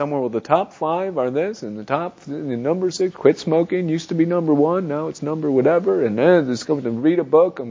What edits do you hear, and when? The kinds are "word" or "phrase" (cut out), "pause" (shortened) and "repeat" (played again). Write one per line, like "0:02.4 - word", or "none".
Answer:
none